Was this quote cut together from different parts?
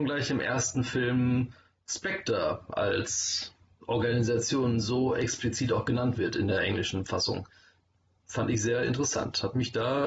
no; 0 cuts

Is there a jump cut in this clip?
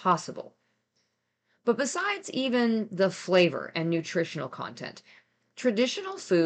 no; 0 cuts

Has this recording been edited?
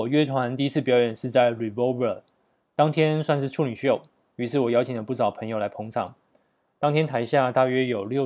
no; 0 cuts

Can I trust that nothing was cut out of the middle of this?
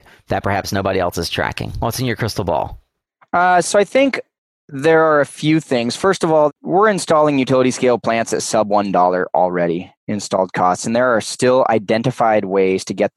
yes; 0 cuts

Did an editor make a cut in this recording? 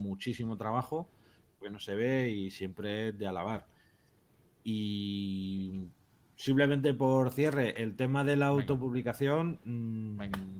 yes; 1 cut; at 1.6 s

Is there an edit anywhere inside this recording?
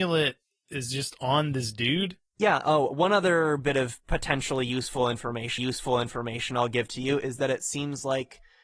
yes; 1 cut; at 5.6 s

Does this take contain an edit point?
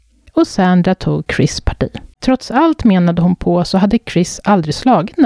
yes; 1 cut; at 2.1 s

